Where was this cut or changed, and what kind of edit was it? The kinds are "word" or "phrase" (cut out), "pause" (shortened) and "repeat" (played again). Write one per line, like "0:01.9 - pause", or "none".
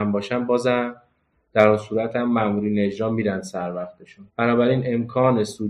0:04.3 - pause